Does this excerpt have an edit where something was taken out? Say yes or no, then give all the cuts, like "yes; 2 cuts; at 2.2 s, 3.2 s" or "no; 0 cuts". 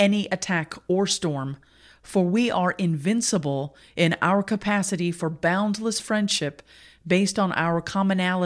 no; 0 cuts